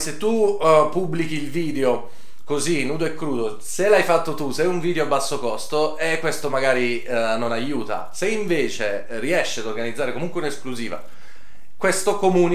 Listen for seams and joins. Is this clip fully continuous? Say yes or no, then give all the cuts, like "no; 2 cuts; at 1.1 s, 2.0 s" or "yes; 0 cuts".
yes; 0 cuts